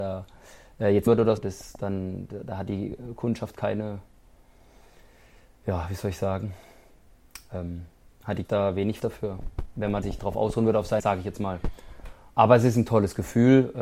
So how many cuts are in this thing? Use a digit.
6